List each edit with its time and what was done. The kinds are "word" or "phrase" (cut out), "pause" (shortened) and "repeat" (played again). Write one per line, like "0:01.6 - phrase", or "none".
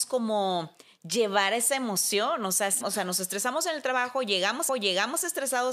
0:02.8 - word
0:04.7 - repeat